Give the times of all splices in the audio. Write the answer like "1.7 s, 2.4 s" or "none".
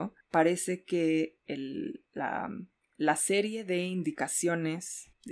none